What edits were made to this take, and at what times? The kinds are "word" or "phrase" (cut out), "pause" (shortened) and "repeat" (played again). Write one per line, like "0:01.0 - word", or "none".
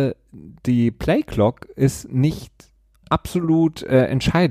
none

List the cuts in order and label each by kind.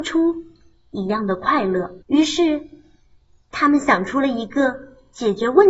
0:02.0 - pause

